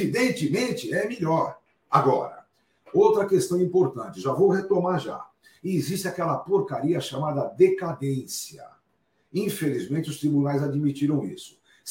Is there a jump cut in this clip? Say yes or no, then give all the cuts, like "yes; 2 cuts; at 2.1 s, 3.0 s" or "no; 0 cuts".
no; 0 cuts